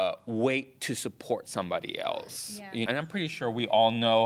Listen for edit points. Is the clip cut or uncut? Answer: cut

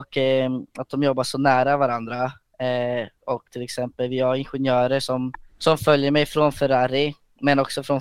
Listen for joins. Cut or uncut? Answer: cut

